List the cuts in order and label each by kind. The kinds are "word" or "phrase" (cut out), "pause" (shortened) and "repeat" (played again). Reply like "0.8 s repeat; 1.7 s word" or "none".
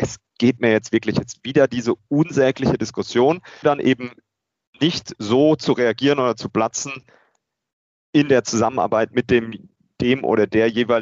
3.6 s word